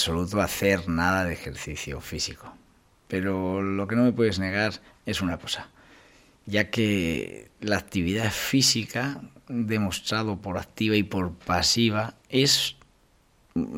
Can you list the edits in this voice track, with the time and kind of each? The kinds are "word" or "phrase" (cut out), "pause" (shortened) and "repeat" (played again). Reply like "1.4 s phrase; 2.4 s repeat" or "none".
none

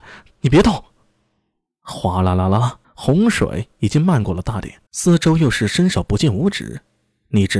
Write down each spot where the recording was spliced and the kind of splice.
2.8 s pause; 4.9 s pause

